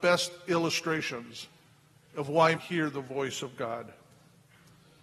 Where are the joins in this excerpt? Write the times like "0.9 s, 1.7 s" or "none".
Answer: 1.9 s, 2.6 s